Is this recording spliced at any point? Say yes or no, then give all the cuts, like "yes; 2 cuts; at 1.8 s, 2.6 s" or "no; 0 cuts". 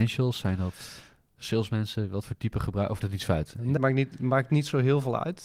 yes; 2 cuts; at 3.0 s, 3.8 s